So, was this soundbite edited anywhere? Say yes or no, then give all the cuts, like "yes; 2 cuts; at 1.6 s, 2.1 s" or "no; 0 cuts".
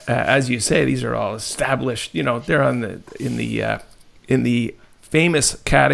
no; 0 cuts